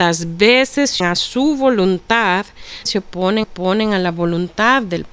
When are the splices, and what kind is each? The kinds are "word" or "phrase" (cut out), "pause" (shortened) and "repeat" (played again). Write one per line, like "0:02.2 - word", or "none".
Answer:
0:01.0 - word
0:02.9 - word
0:03.4 - repeat

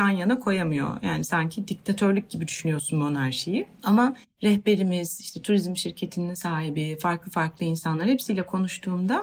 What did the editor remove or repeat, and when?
none

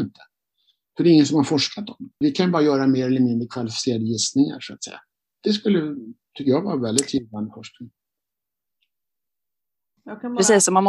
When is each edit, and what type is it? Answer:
0:02.2 - word

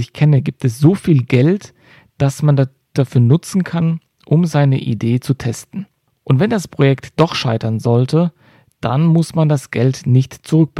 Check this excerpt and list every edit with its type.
none

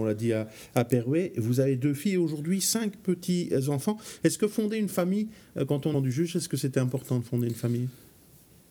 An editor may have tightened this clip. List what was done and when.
0:05.9 - phrase

